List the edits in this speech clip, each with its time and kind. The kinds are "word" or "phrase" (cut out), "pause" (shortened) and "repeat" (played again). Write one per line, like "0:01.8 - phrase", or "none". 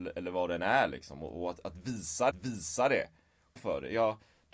0:02.3 - repeat
0:03.6 - phrase